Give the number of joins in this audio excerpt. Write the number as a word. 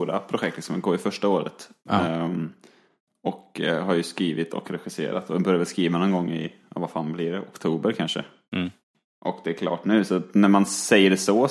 zero